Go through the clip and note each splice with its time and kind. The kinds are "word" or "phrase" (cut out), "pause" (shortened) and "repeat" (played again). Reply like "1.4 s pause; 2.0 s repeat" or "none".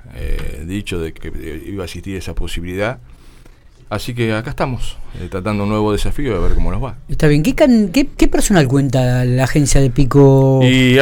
1.2 s word